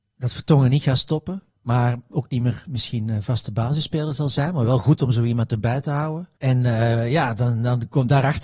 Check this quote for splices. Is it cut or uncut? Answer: cut